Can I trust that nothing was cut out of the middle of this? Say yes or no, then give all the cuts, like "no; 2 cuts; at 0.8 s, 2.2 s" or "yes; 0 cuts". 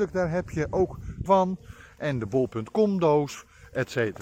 no; 1 cut; at 1.3 s